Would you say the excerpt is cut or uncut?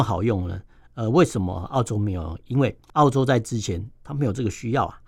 cut